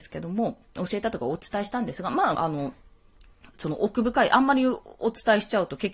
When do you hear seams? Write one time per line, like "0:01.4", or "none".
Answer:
0:02.3